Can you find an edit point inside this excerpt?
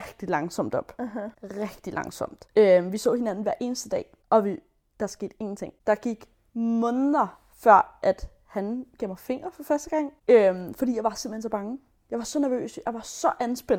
no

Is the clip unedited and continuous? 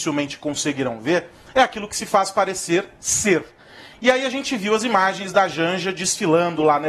yes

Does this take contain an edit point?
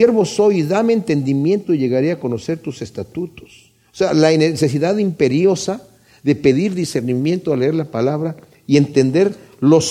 no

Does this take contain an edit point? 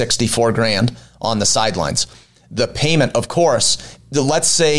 no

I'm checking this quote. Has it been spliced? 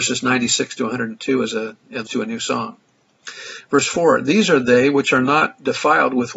yes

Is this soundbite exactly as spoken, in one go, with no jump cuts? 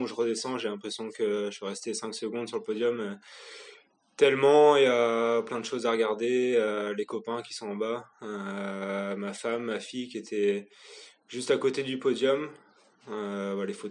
yes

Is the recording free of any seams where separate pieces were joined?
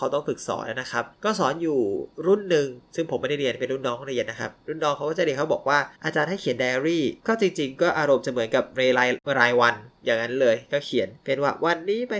no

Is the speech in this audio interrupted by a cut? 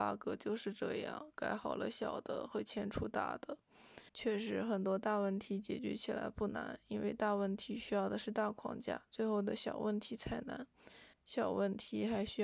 yes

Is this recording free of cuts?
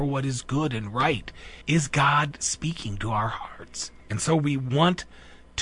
no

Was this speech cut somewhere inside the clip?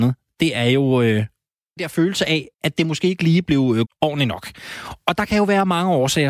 yes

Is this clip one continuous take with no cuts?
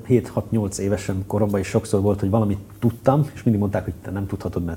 yes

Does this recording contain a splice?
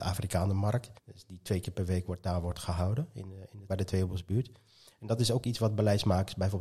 yes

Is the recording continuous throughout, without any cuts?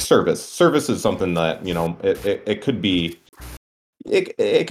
yes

